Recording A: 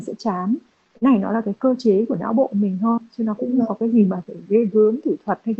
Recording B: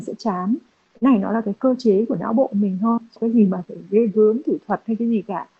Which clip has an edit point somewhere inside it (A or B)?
B